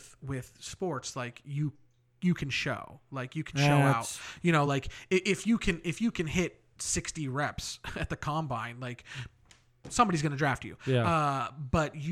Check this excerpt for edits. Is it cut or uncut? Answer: uncut